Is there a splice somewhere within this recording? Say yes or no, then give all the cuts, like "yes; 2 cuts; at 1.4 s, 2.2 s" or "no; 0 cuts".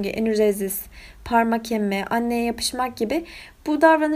no; 0 cuts